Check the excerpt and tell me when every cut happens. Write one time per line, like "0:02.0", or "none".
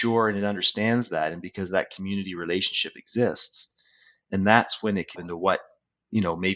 0:05.2